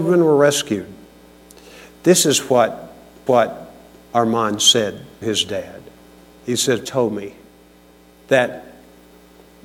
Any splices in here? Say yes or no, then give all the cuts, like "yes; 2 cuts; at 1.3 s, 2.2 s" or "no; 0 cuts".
yes; 3 cuts; at 3.3 s, 5.2 s, 6.9 s